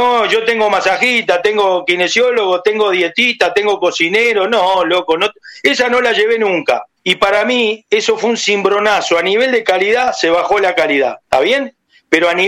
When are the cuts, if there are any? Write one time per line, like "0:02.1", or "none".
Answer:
0:07.0
0:11.2